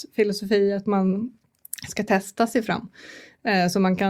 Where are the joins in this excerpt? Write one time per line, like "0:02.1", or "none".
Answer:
none